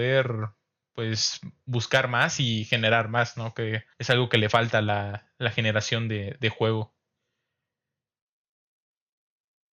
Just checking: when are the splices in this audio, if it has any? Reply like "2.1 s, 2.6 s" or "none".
3.9 s